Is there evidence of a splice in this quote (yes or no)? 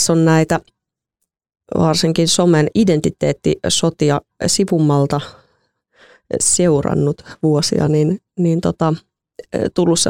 no